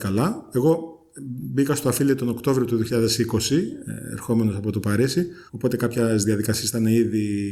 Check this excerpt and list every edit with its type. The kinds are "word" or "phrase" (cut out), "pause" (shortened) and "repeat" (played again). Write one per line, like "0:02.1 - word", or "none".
0:05.5 - pause

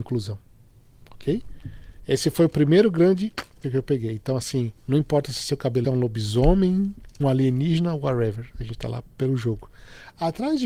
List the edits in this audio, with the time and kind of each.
0:03.6 - word
0:04.8 - pause
0:05.8 - phrase
0:07.2 - word

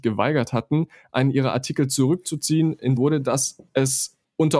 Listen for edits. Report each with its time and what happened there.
0:03.0 - phrase
0:03.7 - pause

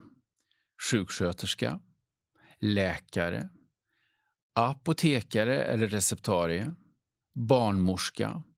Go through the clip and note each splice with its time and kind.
none

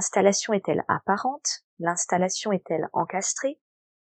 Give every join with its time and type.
none

